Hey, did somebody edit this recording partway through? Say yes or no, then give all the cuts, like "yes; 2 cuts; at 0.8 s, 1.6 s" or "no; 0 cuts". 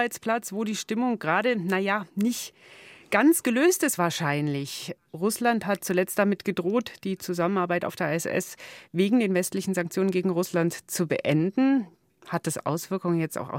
no; 0 cuts